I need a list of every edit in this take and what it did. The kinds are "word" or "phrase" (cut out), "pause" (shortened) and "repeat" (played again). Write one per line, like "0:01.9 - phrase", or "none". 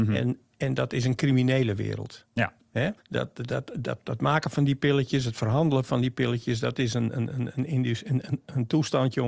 0:03.0 - pause